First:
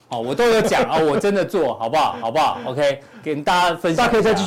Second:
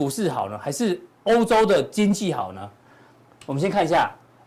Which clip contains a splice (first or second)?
first